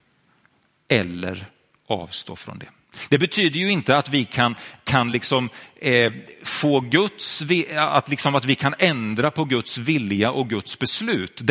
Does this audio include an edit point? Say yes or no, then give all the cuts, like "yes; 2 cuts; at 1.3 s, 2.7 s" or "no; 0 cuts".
no; 0 cuts